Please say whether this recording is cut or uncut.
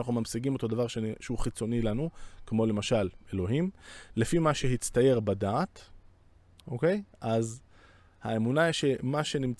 uncut